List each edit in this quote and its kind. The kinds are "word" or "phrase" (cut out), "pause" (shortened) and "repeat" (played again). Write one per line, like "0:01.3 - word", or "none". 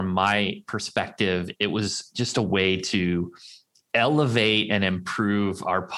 none